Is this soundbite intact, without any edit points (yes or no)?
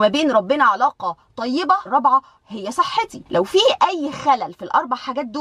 no